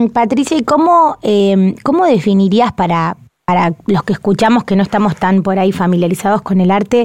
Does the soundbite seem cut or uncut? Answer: uncut